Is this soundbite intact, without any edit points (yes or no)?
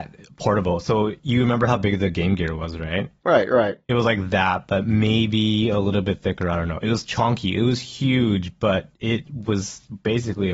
no